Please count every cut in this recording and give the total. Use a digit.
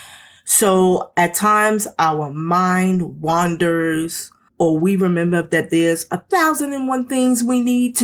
1